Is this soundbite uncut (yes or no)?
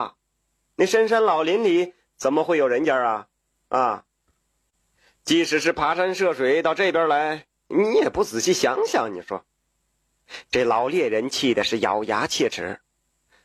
yes